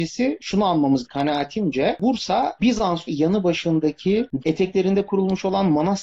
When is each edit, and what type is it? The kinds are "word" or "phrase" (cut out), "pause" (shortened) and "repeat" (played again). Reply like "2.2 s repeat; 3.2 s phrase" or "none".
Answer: 1.1 s word; 3.1 s word; 4.4 s word